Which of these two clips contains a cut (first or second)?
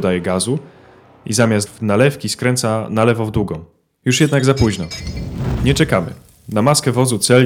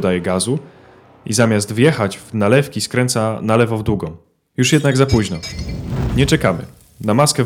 first